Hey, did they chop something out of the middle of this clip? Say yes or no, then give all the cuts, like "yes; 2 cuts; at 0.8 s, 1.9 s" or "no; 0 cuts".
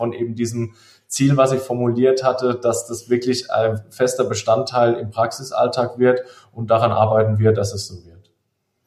no; 0 cuts